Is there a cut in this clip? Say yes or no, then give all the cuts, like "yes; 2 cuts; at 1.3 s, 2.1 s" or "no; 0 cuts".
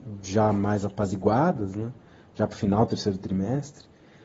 no; 0 cuts